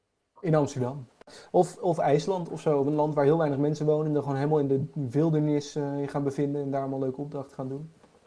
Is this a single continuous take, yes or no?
yes